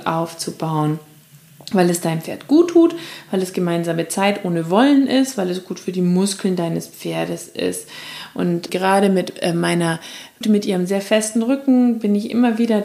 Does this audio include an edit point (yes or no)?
yes